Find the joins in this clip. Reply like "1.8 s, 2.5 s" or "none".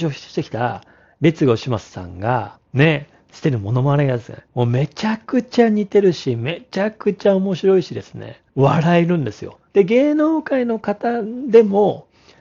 2.7 s, 4.5 s, 8.5 s, 9.7 s